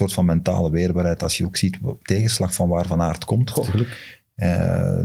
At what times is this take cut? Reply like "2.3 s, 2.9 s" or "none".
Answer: 2.0 s